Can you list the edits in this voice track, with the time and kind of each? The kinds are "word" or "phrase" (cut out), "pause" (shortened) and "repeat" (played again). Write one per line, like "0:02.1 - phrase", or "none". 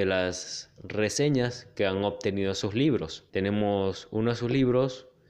0:03.3 - pause